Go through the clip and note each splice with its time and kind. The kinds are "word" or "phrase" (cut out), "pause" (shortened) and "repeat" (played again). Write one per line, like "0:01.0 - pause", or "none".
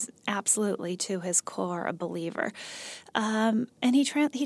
none